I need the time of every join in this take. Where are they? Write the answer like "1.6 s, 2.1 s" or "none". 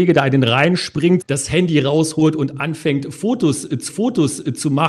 1.2 s, 3.9 s